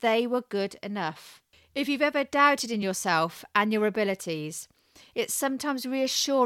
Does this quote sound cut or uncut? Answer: uncut